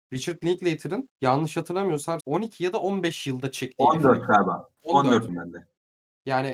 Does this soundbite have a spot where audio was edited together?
yes; 3 cuts; at 1.1 s, 2.2 s, 5.3 s

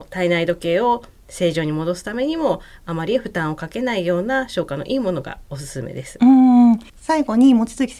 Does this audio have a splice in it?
yes; 1 cut; at 6.9 s

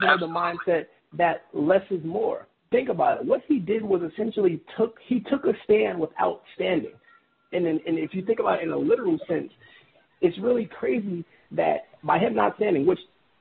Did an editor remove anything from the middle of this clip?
no; 0 cuts

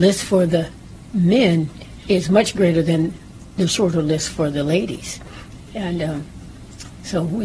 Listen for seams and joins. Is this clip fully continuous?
yes; 0 cuts

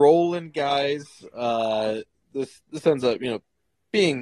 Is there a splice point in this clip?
no; 0 cuts

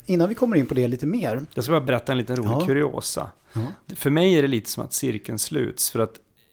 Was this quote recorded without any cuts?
yes; 0 cuts

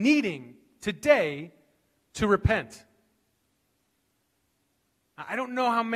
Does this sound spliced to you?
no; 0 cuts

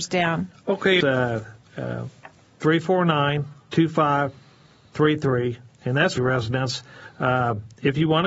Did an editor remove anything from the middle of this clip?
yes; 3 cuts; at 1.0 s, 3.6 s, 6.2 s

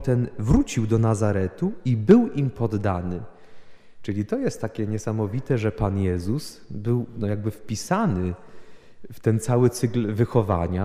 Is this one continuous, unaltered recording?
yes; 0 cuts

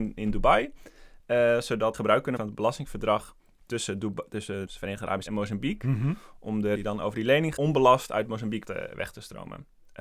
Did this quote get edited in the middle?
yes; 7 cuts; at 1.9 s, 2.4 s, 4.7 s, 5.3 s, 6.7 s, 7.6 s, 8.6 s

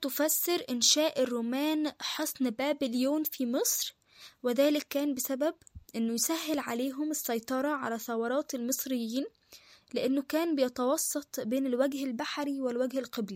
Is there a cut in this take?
no; 0 cuts

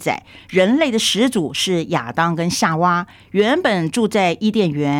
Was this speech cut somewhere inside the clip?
no; 0 cuts

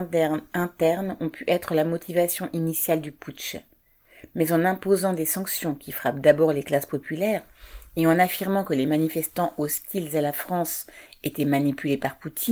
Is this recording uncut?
yes; 0 cuts

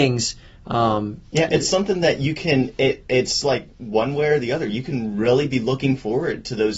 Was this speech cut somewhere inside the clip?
yes; 1 cut; at 1.3 s

